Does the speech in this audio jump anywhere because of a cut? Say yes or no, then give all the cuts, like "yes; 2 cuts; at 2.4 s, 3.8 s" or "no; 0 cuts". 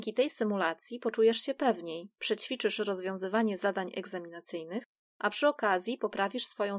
no; 0 cuts